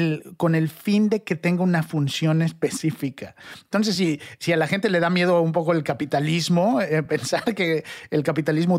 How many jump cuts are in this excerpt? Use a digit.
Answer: 0